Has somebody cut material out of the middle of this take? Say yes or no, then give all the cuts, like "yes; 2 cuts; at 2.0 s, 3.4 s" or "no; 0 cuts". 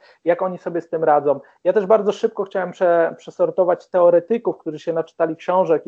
no; 0 cuts